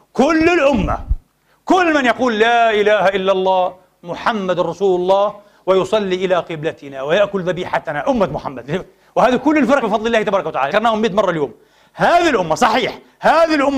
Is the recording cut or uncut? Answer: cut